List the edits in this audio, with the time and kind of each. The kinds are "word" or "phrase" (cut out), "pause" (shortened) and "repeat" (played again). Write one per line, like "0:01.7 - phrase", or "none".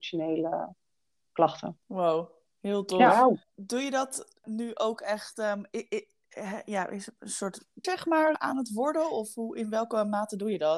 0:01.8 - pause
0:03.4 - pause
0:07.8 - word
0:08.3 - word